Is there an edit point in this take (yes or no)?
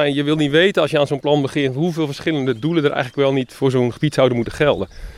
no